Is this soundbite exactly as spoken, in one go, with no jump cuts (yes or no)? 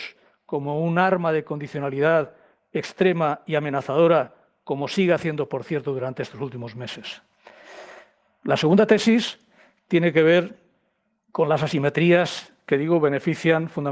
yes